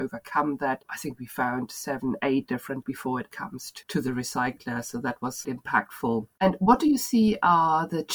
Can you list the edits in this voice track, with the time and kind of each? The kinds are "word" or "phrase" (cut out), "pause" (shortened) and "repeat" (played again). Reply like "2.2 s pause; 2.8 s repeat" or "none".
2.8 s phrase; 3.3 s word; 5.4 s word